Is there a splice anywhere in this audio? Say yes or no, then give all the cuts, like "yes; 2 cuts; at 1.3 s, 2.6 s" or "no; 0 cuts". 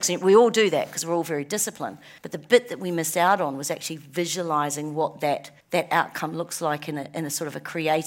yes; 2 cuts; at 2.2 s, 5.6 s